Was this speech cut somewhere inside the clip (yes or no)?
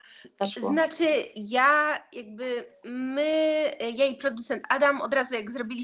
no